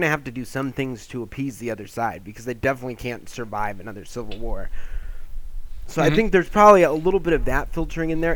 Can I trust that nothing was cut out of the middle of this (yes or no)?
yes